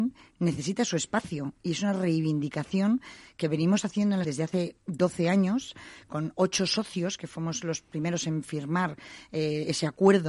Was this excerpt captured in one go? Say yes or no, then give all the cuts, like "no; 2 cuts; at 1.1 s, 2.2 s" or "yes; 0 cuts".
no; 1 cut; at 4.2 s